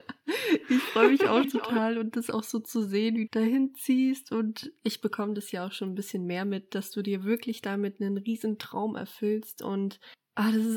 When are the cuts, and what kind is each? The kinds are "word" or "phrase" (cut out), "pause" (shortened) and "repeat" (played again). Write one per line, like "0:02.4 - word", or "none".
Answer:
0:01.4 - word
0:03.3 - phrase